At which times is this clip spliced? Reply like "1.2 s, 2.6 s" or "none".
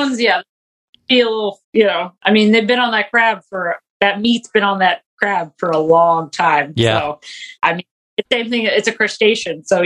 1.6 s, 3.9 s, 7.6 s, 8.2 s